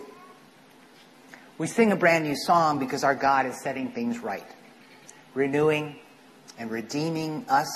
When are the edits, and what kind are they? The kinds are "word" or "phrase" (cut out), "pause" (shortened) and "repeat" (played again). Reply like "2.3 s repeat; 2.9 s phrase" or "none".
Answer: none

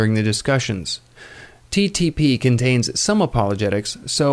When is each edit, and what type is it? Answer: none

